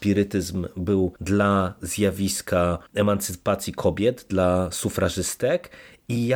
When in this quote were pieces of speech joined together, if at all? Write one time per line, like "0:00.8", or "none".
0:01.2
0:02.9